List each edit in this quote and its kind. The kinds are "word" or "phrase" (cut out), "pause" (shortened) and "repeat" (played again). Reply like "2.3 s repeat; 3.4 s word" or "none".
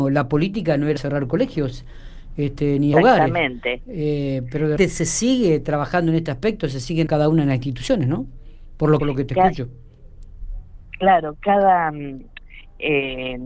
1.0 s word; 2.9 s word; 4.8 s word; 7.1 s word; 9.0 s phrase